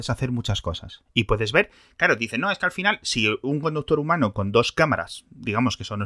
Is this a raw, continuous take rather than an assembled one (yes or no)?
yes